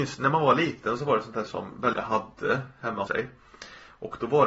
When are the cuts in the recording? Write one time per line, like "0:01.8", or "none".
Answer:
0:01.5
0:01.9
0:03.1